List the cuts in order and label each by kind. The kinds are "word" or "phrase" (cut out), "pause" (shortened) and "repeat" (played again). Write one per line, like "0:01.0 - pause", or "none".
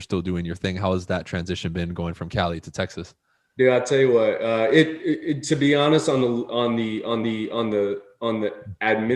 0:07.2 - repeat